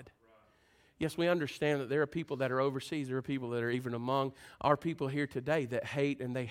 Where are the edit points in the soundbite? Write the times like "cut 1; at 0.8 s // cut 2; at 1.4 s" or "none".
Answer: none